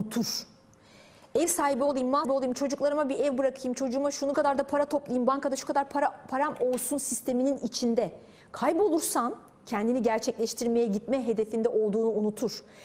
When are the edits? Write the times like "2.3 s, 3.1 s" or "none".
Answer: 2.2 s, 4.3 s